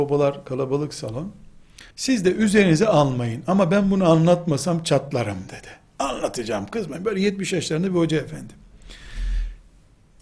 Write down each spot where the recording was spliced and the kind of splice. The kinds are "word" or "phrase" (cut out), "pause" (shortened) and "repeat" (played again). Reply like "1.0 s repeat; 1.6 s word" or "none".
1.9 s pause